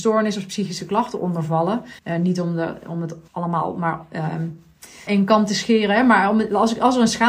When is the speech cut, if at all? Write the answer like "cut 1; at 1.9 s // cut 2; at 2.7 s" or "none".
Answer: cut 1; at 2.0 s // cut 2; at 3.3 s // cut 3; at 5.1 s